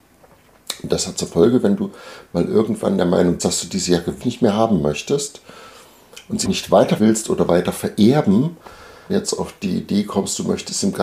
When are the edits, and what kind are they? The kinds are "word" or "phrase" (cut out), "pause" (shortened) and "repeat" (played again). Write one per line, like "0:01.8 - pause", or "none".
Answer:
0:03.4 - word
0:04.2 - word
0:06.4 - word
0:07.0 - word
0:09.1 - word